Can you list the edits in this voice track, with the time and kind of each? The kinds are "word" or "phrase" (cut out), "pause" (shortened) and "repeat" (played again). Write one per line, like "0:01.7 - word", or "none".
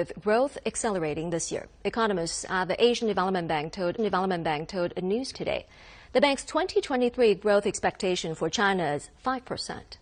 0:04.0 - repeat
0:05.3 - phrase